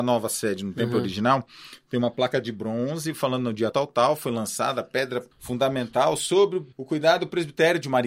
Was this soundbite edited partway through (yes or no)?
yes